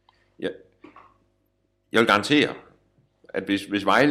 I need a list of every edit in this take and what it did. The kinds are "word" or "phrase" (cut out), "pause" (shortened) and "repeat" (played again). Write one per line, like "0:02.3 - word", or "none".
none